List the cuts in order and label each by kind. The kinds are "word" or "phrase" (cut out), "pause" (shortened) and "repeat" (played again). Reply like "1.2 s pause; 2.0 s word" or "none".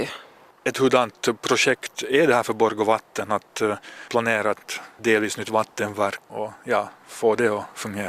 6.3 s word